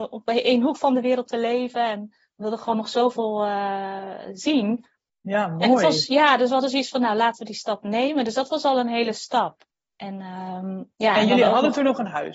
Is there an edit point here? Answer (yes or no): no